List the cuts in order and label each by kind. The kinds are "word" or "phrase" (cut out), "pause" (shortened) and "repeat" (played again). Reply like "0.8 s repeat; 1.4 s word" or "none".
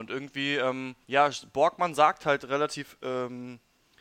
1.0 s pause